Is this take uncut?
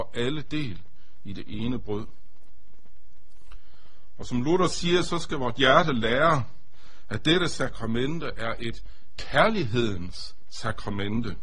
yes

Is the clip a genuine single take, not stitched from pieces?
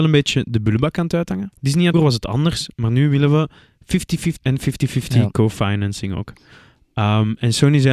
no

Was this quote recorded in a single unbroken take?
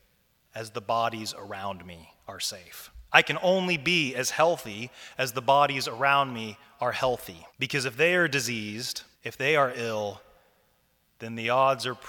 no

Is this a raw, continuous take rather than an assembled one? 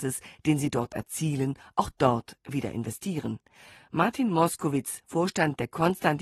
yes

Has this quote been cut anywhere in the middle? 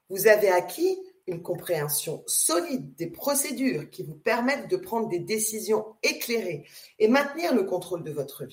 no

